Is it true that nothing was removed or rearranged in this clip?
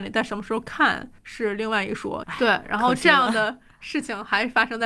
no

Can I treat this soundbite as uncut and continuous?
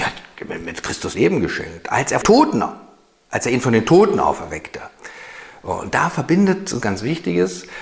no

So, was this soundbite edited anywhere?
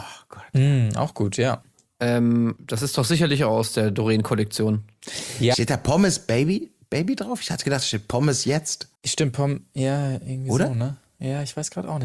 yes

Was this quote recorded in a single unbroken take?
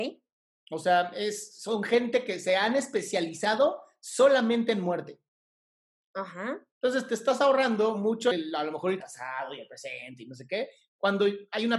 no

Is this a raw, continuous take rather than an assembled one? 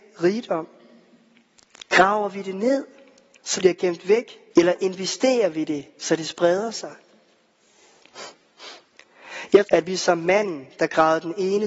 no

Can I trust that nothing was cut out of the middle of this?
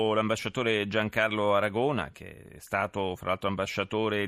yes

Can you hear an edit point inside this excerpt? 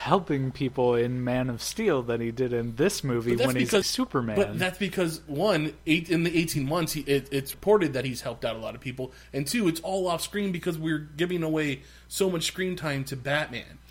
yes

